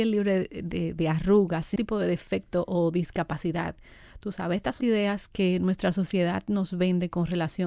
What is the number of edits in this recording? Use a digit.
2